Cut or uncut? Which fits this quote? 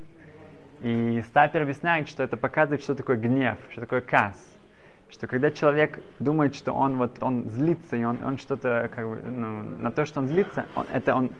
cut